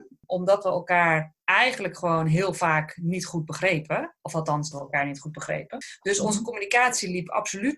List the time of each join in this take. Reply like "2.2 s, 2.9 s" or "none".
1.4 s, 4.2 s, 4.7 s

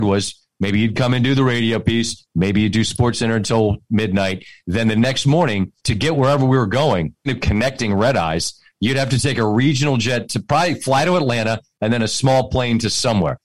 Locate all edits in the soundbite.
5.8 s, 7.3 s

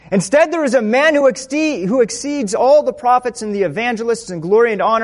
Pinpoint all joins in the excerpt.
none

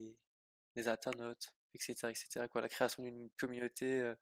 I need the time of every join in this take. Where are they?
1.6 s

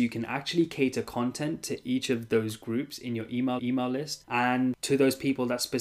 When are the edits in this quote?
3.6 s

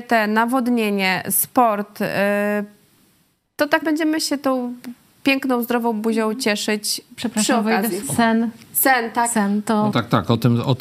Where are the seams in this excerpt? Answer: 3.8 s, 8.0 s, 9.9 s

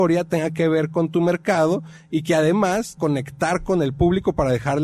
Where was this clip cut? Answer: 3.0 s

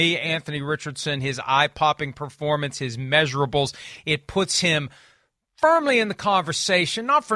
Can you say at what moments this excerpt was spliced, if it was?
none

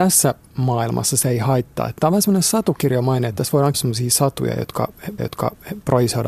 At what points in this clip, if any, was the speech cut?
3.7 s, 5.2 s

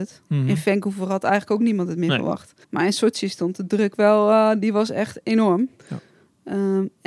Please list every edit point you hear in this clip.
2.6 s, 5.8 s

